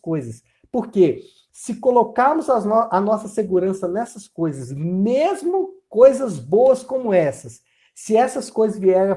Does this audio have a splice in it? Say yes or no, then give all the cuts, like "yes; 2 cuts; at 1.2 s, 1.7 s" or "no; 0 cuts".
no; 0 cuts